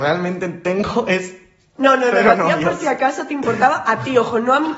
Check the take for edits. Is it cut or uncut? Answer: uncut